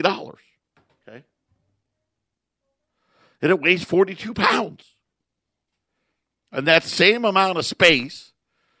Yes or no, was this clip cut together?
no